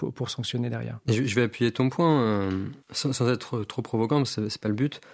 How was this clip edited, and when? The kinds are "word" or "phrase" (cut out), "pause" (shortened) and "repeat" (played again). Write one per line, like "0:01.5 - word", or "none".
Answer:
0:02.8 - pause

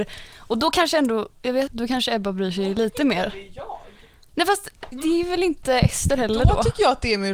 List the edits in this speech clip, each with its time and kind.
0:01.7 - word
0:04.9 - word

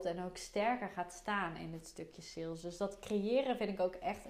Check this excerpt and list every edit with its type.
none

